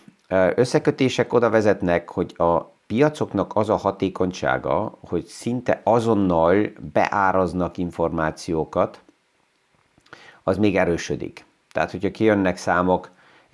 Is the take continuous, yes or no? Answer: yes